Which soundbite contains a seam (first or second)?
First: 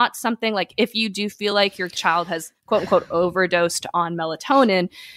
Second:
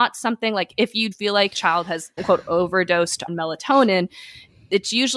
second